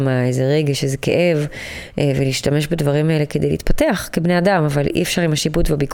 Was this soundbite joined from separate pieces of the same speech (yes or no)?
no